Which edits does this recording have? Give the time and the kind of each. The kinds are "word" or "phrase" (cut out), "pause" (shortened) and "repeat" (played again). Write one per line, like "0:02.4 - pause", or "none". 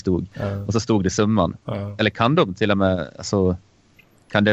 none